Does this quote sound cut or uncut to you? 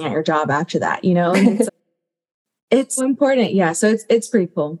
cut